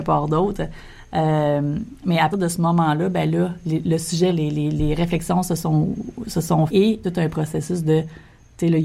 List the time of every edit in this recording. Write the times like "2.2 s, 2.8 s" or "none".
2.3 s, 4.3 s, 6.7 s, 7.0 s